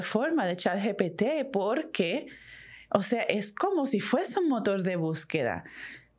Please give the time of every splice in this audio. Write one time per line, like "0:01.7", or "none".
none